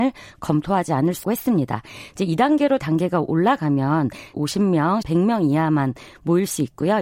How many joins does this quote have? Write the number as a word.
four